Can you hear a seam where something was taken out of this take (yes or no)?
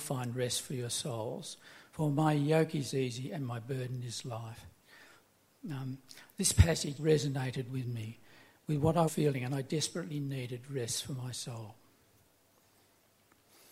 yes